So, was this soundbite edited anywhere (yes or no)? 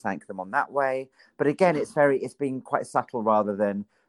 no